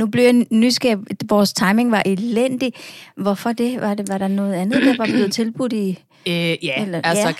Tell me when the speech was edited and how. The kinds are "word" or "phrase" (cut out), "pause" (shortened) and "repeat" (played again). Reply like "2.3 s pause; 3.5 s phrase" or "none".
none